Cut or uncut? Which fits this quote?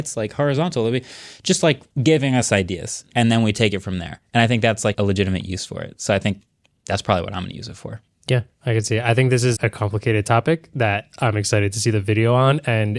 cut